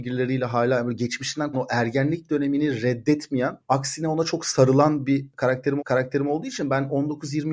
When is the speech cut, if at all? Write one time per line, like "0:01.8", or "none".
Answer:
0:01.5
0:05.8